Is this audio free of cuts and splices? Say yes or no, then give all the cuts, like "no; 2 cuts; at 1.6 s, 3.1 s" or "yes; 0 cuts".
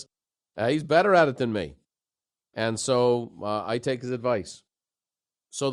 yes; 0 cuts